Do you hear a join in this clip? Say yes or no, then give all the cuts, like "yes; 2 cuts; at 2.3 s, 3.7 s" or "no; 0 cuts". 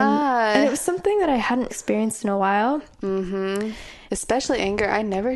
yes; 2 cuts; at 1.7 s, 4.1 s